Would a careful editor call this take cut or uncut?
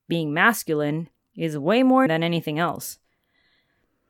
cut